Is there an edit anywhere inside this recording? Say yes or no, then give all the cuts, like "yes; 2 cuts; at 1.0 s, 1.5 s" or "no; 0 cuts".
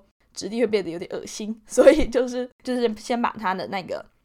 yes; 1 cut; at 2.5 s